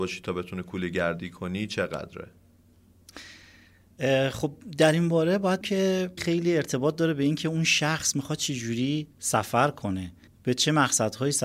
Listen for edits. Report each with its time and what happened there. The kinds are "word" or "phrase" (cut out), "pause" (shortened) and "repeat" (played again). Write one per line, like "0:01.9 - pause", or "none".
0:05.6 - word
0:06.2 - word
0:09.1 - pause
0:10.3 - pause